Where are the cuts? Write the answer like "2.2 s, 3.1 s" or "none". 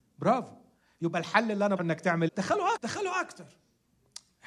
1.8 s, 2.3 s, 2.8 s